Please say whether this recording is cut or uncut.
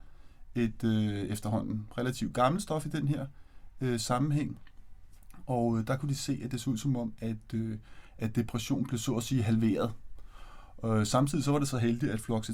uncut